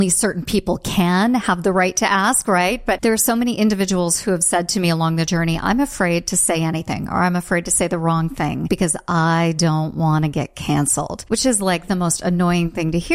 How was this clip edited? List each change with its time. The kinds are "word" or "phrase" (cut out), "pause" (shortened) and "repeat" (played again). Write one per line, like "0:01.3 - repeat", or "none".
none